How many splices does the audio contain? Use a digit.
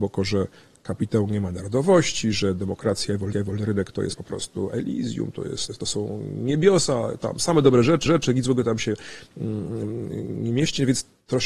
3